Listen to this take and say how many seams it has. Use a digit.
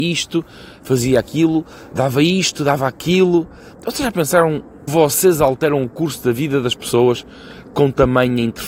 2